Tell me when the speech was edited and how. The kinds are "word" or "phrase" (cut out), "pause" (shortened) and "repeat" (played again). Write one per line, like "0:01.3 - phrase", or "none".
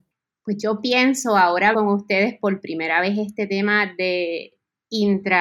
0:01.7 - word